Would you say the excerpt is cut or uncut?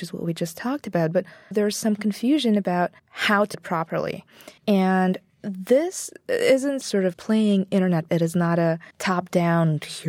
cut